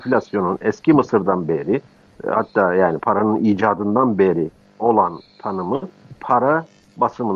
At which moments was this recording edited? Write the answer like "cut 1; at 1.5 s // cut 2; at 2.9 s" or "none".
none